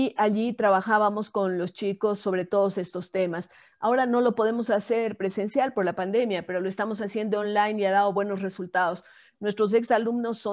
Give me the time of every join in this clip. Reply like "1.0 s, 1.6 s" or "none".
none